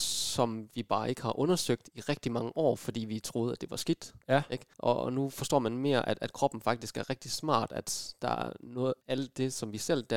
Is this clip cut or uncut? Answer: cut